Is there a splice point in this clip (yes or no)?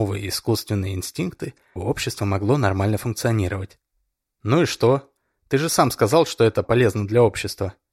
yes